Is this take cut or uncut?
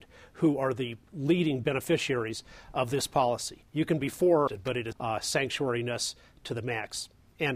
cut